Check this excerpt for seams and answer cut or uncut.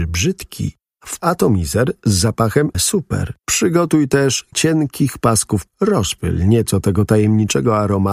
cut